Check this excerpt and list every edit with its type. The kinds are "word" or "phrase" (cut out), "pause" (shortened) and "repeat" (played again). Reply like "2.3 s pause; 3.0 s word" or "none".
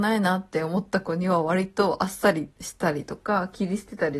2.5 s pause